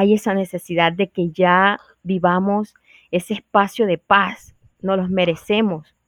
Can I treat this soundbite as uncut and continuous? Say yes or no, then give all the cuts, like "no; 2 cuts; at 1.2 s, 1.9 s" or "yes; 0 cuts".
yes; 0 cuts